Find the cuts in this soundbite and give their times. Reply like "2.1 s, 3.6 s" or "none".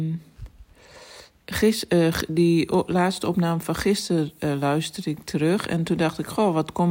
none